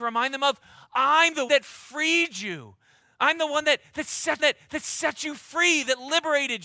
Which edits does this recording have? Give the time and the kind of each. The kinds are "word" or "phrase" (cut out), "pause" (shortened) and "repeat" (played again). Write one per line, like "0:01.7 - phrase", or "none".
0:01.5 - word
0:04.4 - repeat